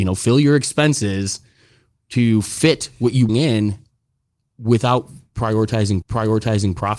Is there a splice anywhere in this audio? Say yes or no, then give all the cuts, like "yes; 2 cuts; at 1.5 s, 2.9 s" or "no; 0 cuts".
yes; 2 cuts; at 3.3 s, 6.0 s